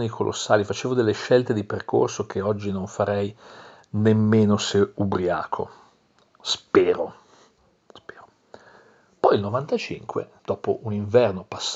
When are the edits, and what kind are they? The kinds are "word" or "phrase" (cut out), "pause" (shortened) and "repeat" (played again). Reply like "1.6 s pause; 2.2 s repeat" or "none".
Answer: 10.4 s pause